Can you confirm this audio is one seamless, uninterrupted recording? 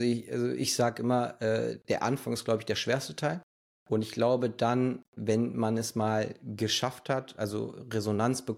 yes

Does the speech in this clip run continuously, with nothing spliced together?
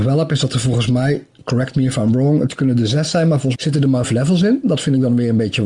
no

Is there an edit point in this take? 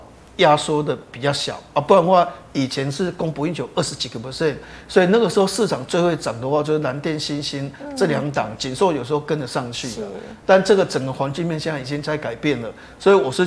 no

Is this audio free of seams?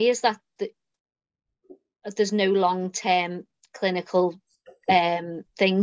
yes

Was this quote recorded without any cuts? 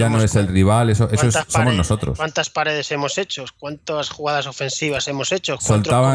yes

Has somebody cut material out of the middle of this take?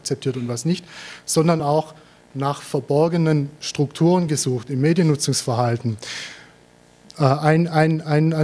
no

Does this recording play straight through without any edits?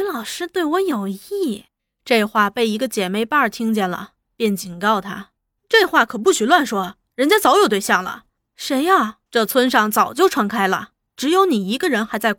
no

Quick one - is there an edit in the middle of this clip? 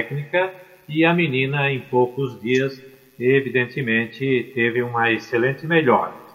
no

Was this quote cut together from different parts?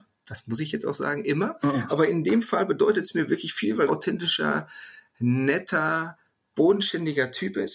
yes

